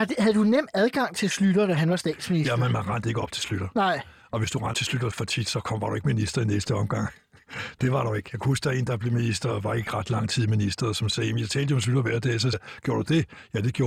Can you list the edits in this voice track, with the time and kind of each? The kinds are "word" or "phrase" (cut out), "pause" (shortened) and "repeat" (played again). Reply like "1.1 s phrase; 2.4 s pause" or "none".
4.7 s word; 5.1 s word; 12.5 s word